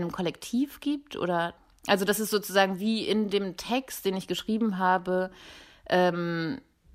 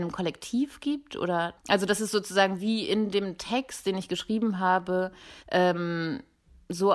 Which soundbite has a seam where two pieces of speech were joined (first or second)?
second